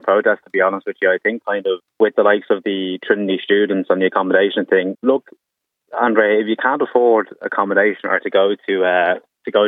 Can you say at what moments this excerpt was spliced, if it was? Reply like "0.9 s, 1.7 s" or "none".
1.8 s, 4.9 s